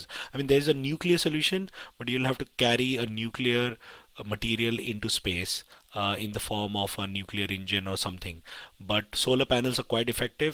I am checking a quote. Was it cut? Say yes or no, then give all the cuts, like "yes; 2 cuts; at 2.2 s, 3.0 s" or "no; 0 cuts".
no; 0 cuts